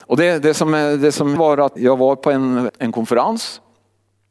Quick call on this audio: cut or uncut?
cut